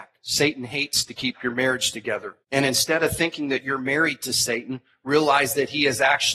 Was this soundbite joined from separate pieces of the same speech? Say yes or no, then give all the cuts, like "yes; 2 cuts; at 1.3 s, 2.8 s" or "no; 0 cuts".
yes; 1 cut; at 2.4 s